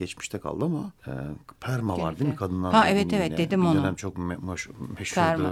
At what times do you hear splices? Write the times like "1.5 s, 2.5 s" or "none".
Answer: 1.0 s